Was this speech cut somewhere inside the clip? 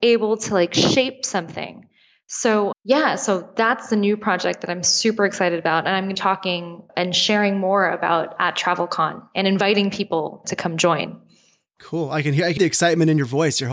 yes; 6 cuts; at 2.7 s, 6.1 s, 6.9 s, 8.4 s, 10.4 s, 12.6 s

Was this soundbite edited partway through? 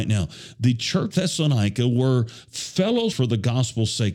yes; 2 cuts; at 1.1 s, 3.1 s

